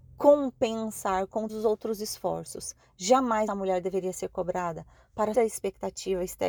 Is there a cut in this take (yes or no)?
yes